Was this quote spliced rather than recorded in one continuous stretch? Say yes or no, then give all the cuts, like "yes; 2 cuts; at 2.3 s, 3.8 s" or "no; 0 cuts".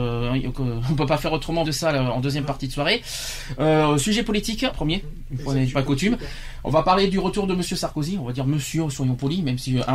yes; 2 cuts; at 1.6 s, 4.7 s